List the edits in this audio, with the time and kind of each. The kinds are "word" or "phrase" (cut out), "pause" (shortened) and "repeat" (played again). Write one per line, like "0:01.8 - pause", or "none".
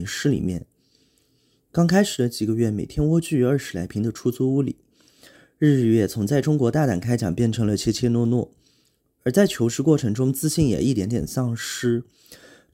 none